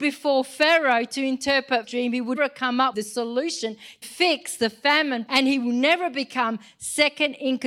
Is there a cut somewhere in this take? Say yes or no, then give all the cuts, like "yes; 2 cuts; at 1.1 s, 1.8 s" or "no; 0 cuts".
yes; 5 cuts; at 1.8 s, 2.4 s, 2.9 s, 4.0 s, 5.3 s